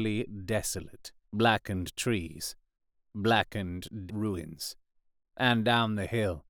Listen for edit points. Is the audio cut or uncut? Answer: cut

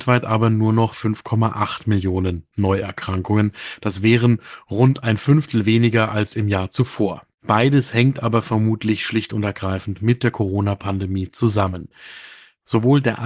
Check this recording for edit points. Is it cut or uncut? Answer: cut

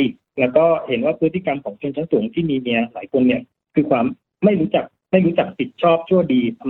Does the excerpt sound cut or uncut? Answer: uncut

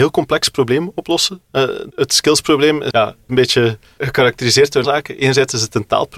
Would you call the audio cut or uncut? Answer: cut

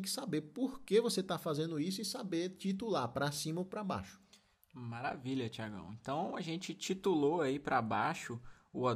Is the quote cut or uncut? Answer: uncut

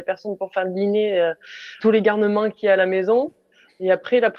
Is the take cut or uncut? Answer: cut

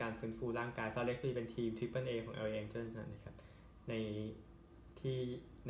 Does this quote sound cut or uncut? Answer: uncut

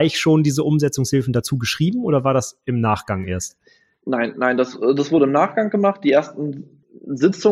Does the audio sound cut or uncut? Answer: uncut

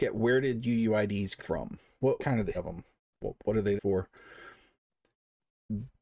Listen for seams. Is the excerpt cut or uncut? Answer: cut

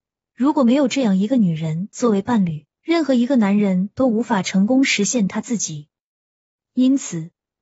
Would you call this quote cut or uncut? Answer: cut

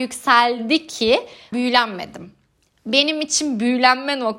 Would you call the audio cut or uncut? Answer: cut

